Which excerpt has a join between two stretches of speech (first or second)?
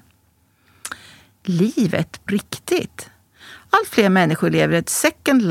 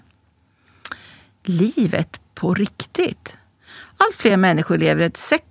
first